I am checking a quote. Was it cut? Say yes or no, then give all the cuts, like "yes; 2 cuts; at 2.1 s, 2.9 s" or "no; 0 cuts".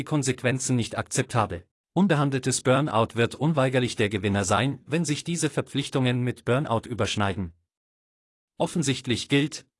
yes; 1 cut; at 1.7 s